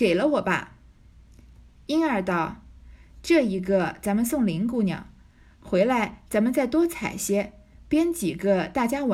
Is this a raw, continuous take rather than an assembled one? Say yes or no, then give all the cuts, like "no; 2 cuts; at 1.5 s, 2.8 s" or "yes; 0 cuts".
yes; 0 cuts